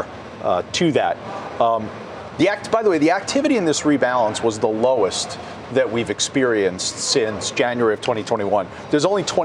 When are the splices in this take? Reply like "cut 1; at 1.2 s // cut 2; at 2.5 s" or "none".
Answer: none